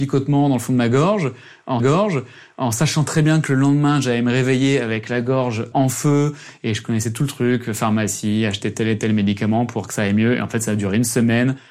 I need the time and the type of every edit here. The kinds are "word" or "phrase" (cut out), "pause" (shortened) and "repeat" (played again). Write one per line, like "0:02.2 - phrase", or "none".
0:01.8 - repeat
0:05.7 - word